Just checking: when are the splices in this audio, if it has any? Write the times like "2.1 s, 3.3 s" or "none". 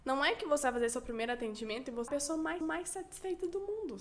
2.1 s, 2.6 s